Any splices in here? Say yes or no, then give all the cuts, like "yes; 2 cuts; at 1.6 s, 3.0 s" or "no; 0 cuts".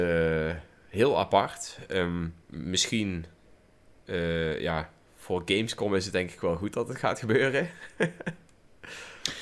yes; 1 cut; at 2.4 s